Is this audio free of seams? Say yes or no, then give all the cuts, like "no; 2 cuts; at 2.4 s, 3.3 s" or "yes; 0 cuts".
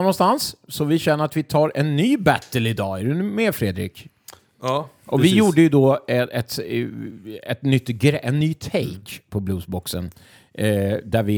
yes; 0 cuts